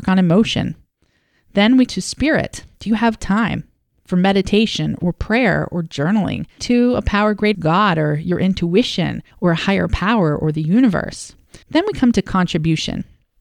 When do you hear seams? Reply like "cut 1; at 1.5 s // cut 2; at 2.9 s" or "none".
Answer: cut 1; at 1.9 s // cut 2; at 2.7 s // cut 3; at 3.2 s // cut 4; at 6.6 s // cut 5; at 7.5 s // cut 6; at 9.3 s // cut 7; at 11.6 s